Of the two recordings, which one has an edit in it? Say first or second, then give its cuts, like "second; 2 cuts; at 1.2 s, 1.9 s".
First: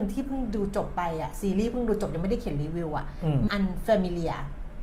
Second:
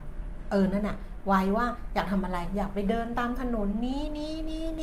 first; 1 cut; at 3.5 s